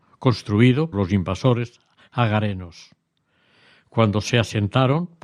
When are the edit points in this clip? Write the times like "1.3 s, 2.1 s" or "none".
0.9 s